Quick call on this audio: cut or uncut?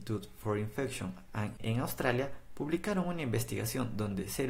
cut